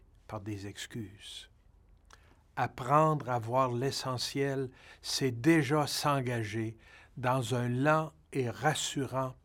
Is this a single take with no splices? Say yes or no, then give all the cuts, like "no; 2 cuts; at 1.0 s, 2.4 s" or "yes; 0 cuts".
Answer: yes; 0 cuts